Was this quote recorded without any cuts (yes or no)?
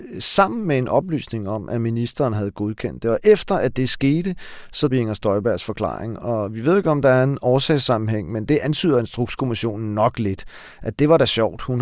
no